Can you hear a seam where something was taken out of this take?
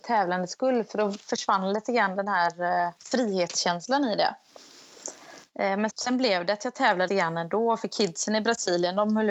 yes; 3 cuts; at 3.0 s, 5.9 s, 7.1 s

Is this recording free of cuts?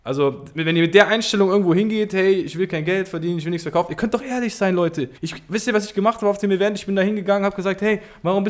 no; 1 cut; at 5.2 s

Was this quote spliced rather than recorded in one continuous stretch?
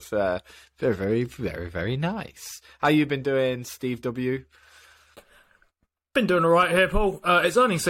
no; 0 cuts

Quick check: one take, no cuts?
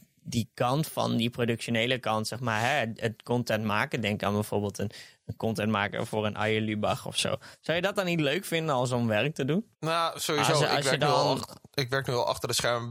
no; 2 cuts; at 9.7 s, 11.7 s

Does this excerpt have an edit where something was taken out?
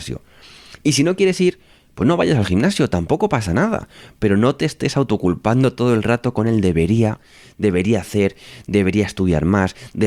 no; 0 cuts

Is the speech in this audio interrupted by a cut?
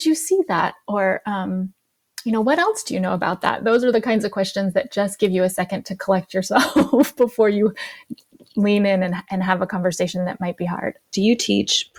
no; 0 cuts

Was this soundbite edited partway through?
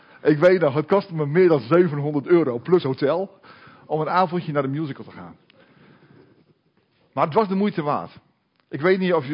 no; 0 cuts

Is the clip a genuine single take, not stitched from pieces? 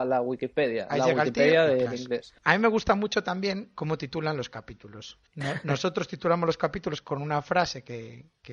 no; 2 cuts; at 2.4 s, 5.3 s

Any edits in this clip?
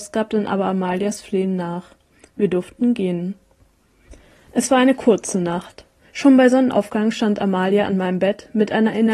no; 0 cuts

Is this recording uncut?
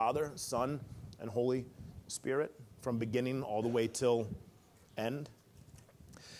no; 1 cut; at 2.7 s

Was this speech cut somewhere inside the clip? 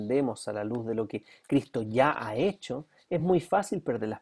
no; 0 cuts

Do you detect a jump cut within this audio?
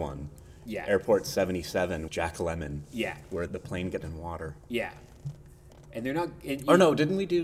yes; 3 cuts; at 2.1 s, 3.5 s, 4.0 s

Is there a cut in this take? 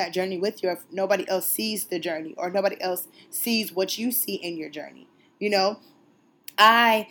no; 0 cuts

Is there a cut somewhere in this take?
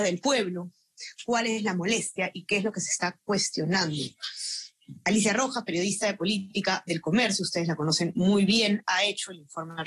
no; 0 cuts

